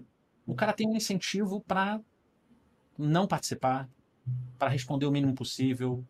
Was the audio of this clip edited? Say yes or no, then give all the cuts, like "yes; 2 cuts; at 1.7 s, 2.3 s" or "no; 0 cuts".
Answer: no; 0 cuts